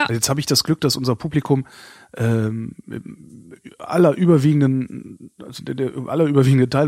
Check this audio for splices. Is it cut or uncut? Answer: uncut